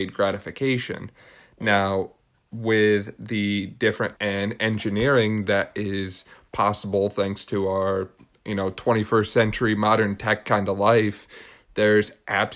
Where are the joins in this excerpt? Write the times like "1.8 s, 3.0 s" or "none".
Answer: 4.2 s